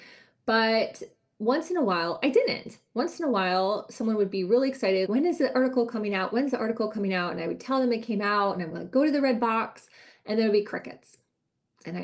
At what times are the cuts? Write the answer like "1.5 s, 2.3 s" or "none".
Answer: 5.1 s